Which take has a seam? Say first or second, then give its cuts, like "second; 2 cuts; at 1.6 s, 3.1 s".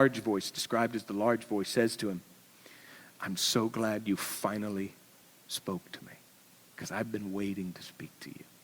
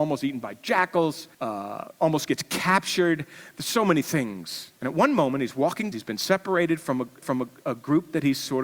second; 4 cuts; at 1.3 s, 4.8 s, 5.9 s, 7.2 s